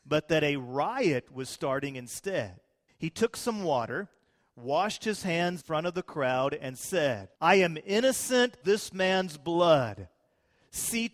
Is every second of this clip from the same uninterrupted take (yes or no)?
no